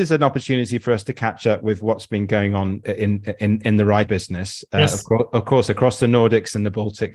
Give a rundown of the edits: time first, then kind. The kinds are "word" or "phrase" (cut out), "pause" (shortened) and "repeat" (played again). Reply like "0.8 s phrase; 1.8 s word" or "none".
2.8 s word; 4.1 s word